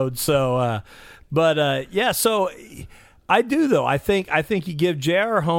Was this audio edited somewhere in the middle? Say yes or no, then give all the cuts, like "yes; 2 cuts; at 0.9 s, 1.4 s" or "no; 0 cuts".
no; 0 cuts